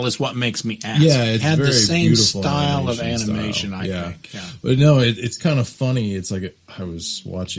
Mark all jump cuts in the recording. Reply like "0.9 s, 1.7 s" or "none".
1.4 s

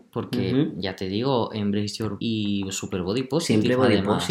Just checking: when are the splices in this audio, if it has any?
2.2 s

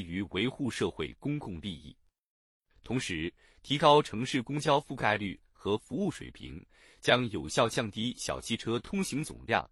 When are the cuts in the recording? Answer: none

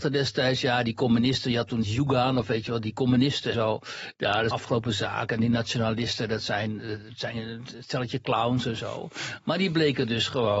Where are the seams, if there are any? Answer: 1.8 s, 3.5 s, 4.5 s

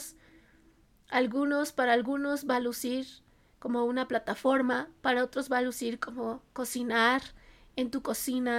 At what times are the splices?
none

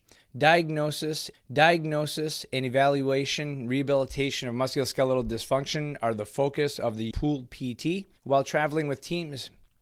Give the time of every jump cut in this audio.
1.3 s, 7.1 s, 8.2 s

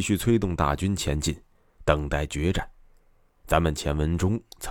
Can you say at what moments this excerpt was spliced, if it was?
none

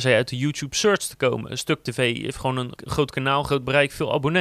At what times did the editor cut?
2.8 s

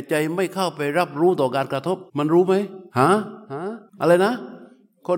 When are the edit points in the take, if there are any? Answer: 2.1 s, 2.9 s, 3.4 s, 3.9 s

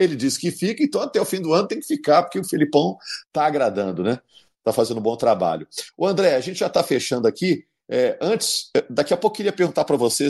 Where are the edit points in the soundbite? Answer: none

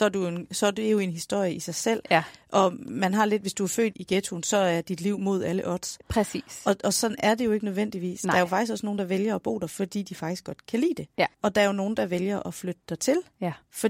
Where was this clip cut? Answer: 3.9 s, 11.3 s

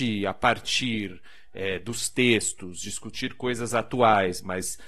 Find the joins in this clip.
none

